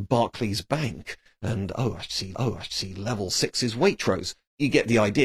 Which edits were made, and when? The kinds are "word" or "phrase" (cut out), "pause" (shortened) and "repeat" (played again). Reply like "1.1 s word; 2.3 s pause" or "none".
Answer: 2.3 s repeat